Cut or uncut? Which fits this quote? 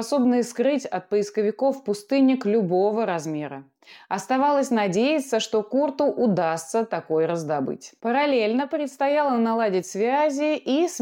uncut